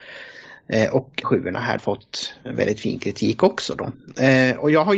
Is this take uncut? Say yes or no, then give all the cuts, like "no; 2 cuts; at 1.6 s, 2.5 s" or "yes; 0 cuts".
no; 2 cuts; at 1.2 s, 1.8 s